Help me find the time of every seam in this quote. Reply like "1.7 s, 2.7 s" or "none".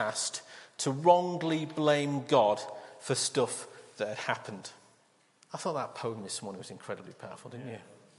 5.3 s